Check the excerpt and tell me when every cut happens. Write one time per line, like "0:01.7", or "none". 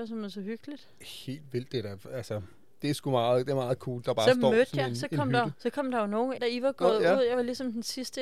0:06.4